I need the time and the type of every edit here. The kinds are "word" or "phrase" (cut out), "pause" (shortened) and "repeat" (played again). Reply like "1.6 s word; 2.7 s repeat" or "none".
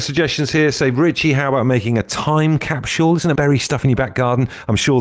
3.4 s phrase